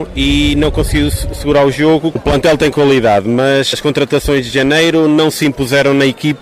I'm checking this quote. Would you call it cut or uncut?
cut